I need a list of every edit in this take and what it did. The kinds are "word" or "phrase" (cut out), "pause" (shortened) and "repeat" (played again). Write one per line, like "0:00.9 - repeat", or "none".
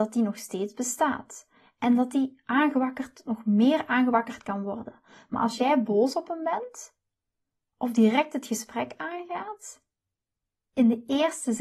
none